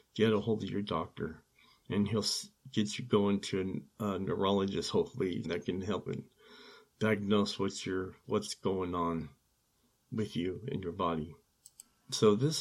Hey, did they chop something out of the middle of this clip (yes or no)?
yes